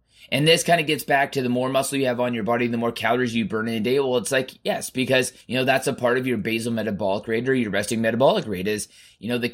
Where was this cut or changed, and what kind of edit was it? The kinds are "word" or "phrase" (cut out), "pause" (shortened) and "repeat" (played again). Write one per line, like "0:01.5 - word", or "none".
0:05.4 - pause